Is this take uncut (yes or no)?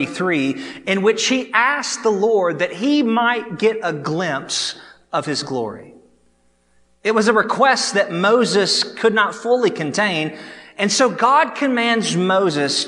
yes